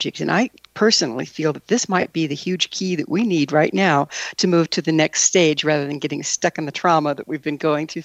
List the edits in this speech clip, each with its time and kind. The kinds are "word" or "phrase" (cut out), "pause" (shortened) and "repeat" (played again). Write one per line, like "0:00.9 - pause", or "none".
none